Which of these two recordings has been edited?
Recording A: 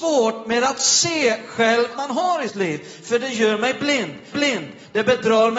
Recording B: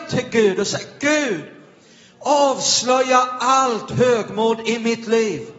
A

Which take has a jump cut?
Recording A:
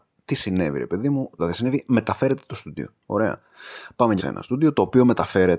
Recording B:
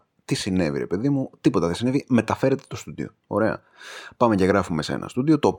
A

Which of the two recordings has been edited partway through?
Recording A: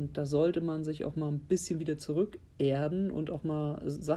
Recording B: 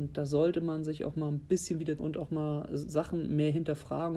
B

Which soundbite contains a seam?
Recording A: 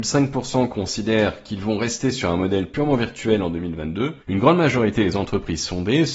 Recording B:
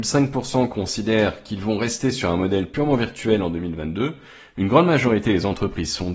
A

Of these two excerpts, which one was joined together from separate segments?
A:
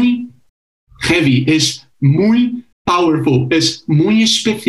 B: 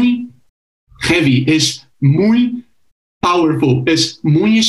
A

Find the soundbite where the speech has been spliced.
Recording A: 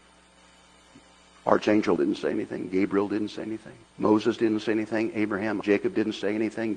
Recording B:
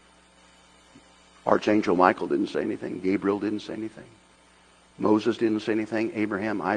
A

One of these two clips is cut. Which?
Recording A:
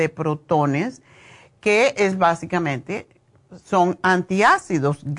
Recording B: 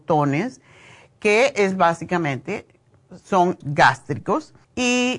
B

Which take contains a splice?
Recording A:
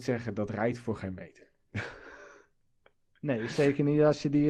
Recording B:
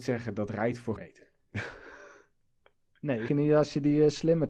B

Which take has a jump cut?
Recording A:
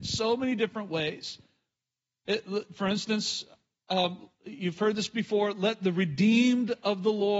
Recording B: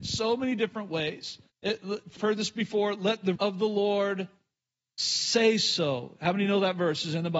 B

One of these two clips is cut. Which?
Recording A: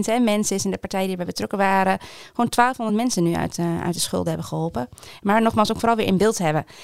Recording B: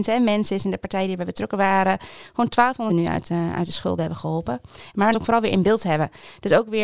B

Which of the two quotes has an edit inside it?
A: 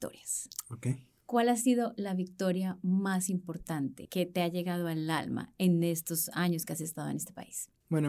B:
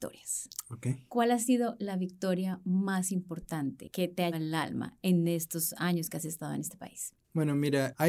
B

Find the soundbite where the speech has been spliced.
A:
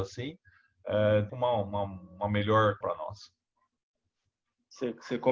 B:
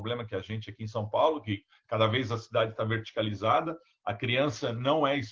A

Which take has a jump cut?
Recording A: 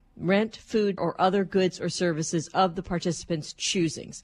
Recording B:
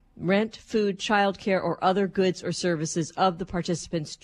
A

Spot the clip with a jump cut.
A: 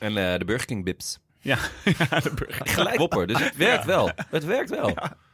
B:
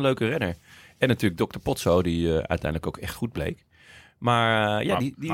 A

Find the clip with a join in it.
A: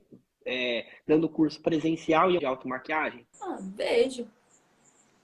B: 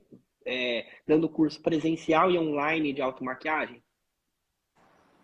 A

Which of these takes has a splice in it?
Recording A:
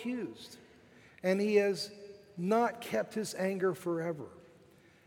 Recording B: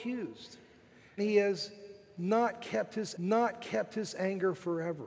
B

